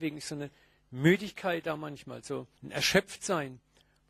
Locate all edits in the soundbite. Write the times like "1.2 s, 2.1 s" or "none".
2.6 s

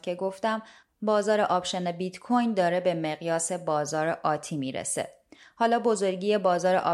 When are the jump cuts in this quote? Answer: none

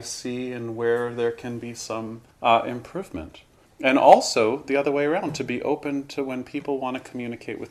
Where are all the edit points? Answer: 2.3 s, 3.6 s

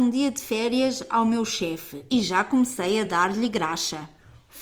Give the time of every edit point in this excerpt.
none

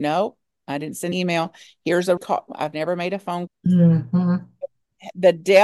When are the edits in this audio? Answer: 1.1 s, 2.2 s, 2.5 s, 3.5 s

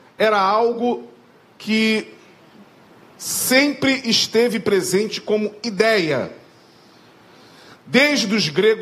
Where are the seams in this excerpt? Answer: none

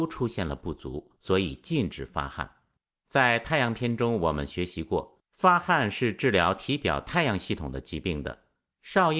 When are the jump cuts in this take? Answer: 1.2 s, 2.8 s

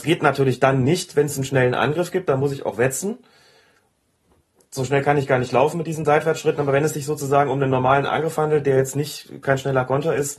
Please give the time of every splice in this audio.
none

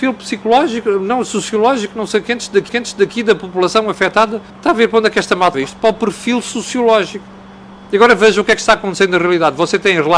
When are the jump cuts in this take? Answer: 2.7 s, 4.5 s, 5.5 s

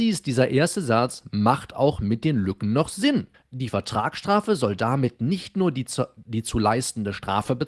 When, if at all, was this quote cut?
3.3 s

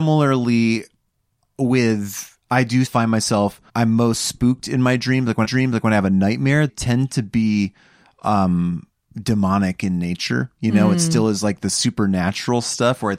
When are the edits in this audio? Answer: 2.4 s, 2.9 s, 3.7 s, 5.4 s, 6.7 s, 9.0 s

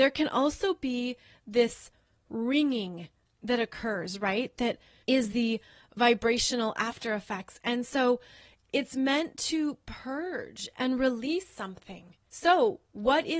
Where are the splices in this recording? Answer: none

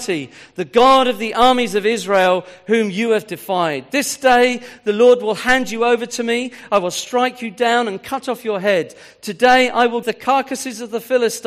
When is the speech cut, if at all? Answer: 10.0 s

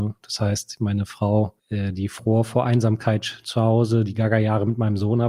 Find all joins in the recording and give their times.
1.6 s

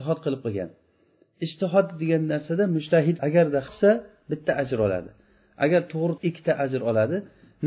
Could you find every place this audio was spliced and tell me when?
3.2 s, 3.7 s, 6.2 s

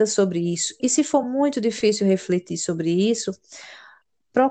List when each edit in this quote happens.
none

